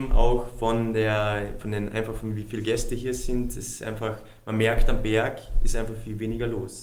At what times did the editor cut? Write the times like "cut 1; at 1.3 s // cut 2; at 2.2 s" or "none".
none